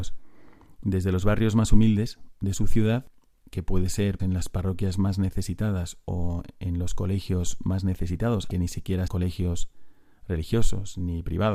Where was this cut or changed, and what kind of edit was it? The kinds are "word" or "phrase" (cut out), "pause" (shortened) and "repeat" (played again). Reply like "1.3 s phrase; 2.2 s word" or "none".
4.2 s word; 8.5 s word; 9.1 s word